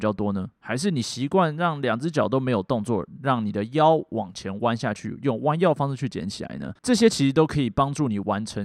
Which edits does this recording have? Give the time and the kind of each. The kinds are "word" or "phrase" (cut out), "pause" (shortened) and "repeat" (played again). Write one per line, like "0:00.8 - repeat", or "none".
0:06.8 - pause